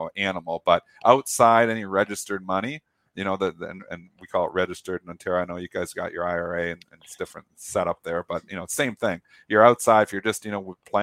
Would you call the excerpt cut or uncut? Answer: uncut